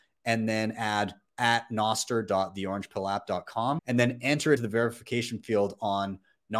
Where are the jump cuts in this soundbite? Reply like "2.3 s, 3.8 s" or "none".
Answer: 3.8 s, 4.6 s